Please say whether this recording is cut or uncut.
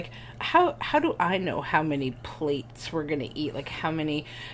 uncut